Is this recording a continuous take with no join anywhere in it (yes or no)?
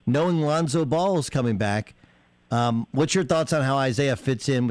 yes